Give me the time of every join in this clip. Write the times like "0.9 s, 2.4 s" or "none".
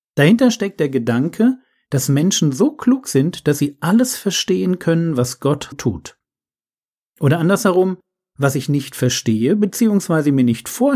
5.7 s

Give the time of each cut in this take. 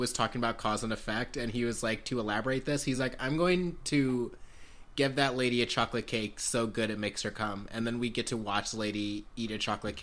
none

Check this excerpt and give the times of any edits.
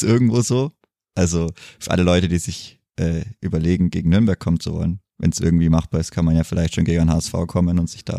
2.9 s, 5.1 s

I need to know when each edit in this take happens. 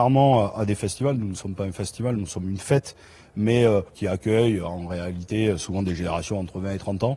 3.9 s

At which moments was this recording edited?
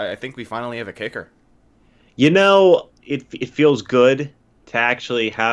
2.9 s

